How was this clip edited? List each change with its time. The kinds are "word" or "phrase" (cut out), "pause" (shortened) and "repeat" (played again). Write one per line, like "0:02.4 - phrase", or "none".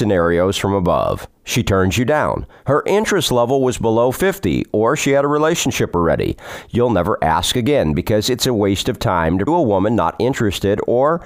0:09.5 - word